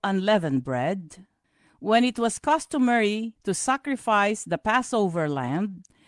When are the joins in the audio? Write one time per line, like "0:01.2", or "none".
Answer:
none